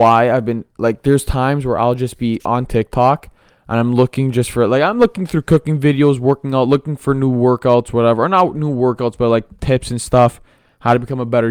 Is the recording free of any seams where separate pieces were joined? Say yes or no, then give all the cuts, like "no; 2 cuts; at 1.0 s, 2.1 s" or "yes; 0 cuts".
yes; 0 cuts